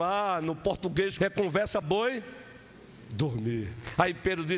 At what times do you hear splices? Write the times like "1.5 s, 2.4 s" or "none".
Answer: 1.2 s, 1.8 s